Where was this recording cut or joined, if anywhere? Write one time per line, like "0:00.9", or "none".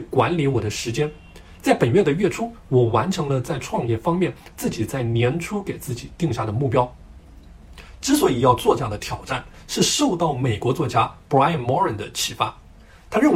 none